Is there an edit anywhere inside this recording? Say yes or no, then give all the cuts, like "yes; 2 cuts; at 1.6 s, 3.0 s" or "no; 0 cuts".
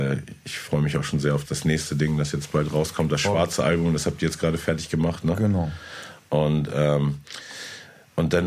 yes; 1 cut; at 1.5 s